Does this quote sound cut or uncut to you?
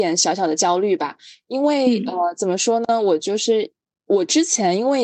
uncut